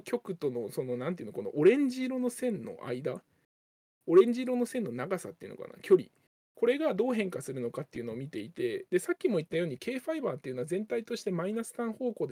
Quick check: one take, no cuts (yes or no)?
yes